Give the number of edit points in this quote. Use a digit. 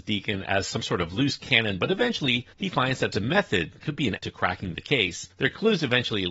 6